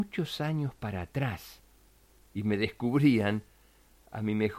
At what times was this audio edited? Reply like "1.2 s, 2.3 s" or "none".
1.9 s